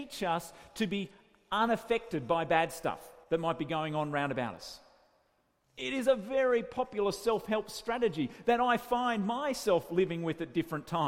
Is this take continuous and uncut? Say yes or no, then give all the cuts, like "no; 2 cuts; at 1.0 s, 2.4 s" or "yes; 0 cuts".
no; 1 cut; at 3.2 s